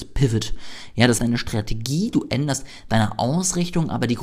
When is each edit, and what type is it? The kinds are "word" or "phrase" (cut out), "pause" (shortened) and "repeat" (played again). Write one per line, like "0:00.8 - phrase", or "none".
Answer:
0:01.2 - phrase